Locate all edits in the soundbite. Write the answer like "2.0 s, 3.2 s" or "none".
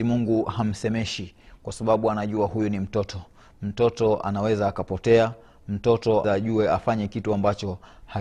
6.2 s